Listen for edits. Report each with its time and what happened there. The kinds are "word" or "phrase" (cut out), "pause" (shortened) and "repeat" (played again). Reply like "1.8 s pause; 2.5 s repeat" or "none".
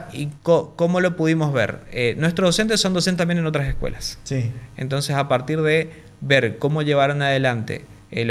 none